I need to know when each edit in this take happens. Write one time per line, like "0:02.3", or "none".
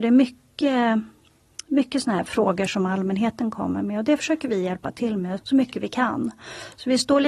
0:05.4